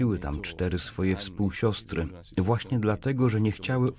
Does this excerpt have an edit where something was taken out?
no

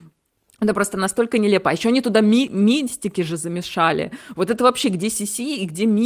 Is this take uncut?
yes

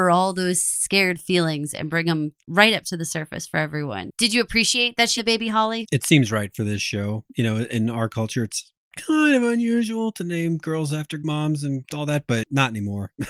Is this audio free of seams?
no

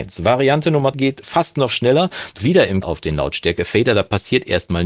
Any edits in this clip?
yes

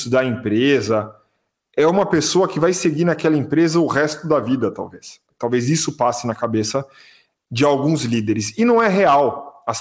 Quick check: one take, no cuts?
yes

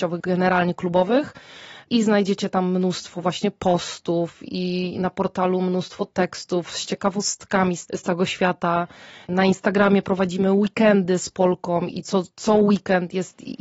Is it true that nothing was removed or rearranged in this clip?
yes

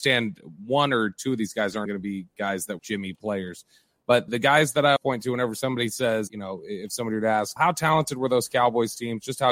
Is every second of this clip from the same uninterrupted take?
no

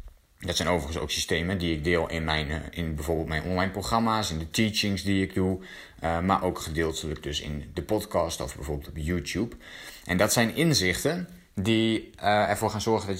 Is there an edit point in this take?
no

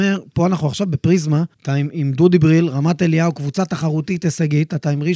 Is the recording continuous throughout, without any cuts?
no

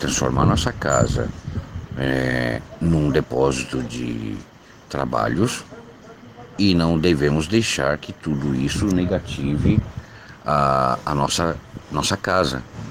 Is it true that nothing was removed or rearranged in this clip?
yes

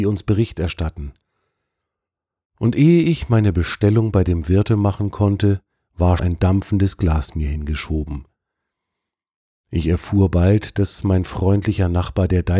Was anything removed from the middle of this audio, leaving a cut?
yes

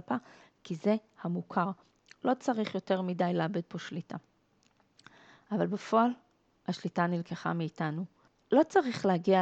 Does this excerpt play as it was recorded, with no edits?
yes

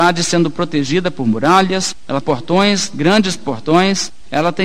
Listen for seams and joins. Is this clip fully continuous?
no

